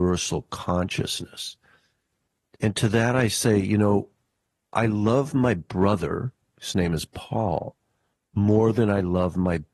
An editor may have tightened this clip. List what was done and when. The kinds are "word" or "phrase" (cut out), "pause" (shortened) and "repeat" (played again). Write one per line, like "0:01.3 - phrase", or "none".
none